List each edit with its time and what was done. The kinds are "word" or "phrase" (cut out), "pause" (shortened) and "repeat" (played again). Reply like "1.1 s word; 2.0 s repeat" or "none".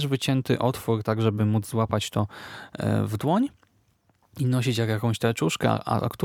none